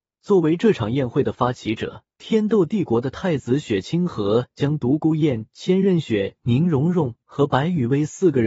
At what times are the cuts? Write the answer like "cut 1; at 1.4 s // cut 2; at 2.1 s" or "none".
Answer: cut 1; at 2.1 s